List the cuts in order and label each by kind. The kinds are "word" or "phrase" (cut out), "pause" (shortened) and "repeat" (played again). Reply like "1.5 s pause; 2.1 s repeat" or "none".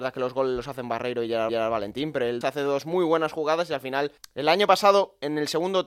1.5 s repeat; 2.4 s phrase; 4.2 s pause